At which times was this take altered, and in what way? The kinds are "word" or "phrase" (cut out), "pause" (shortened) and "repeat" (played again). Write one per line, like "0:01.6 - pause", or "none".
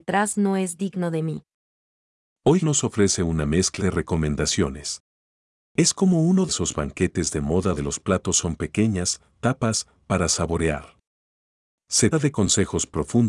0:02.6 - word
0:03.8 - word
0:06.5 - word
0:07.8 - word
0:12.1 - word